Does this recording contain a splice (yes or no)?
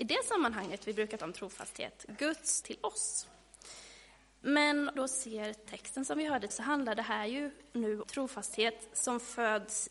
yes